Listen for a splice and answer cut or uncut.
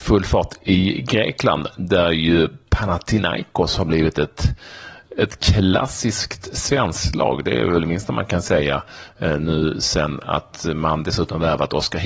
uncut